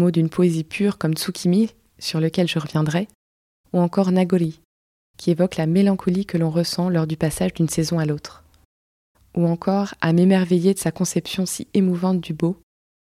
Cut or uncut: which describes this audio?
uncut